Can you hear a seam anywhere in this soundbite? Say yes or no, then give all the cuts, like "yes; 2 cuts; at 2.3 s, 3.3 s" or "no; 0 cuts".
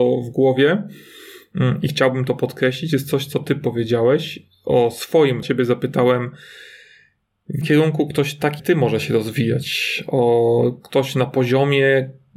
yes; 3 cuts; at 5.4 s, 7.6 s, 8.6 s